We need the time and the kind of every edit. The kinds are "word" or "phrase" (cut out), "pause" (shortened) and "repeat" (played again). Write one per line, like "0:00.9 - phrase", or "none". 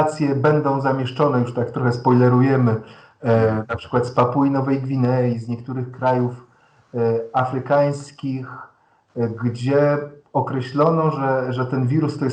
none